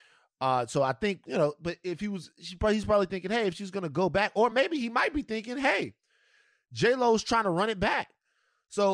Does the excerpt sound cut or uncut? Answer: uncut